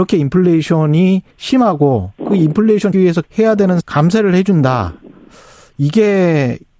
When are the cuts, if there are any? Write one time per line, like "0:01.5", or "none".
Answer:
0:01.3
0:02.9
0:03.2
0:03.8

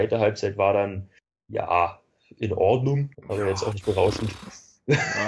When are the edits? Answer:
0:01.2
0:03.1

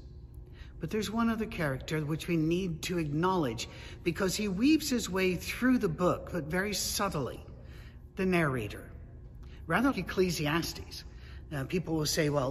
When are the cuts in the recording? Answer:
0:09.9

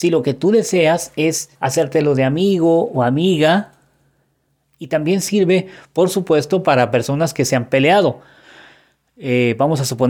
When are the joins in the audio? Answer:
0:01.5

